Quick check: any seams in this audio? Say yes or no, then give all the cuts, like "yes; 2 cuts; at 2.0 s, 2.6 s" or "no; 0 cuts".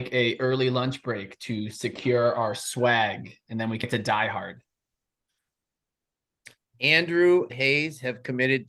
yes; 2 cuts; at 3.8 s, 7.5 s